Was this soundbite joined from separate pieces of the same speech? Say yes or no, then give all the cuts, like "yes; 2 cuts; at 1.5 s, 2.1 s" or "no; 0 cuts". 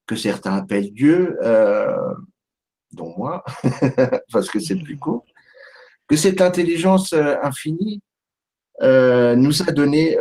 no; 0 cuts